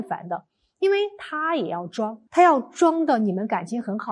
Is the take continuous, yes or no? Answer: no